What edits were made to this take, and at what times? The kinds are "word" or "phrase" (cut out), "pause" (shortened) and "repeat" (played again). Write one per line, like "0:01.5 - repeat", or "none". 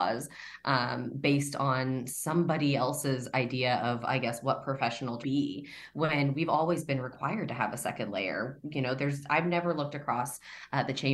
0:05.2 - phrase